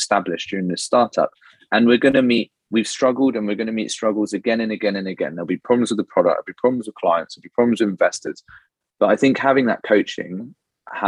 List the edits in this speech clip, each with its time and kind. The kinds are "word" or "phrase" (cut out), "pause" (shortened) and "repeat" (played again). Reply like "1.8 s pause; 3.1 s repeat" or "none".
none